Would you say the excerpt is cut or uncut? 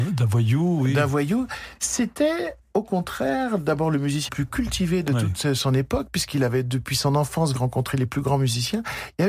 cut